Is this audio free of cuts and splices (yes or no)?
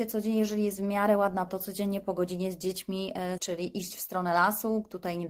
no